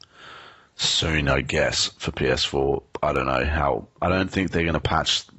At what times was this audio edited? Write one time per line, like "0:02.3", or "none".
none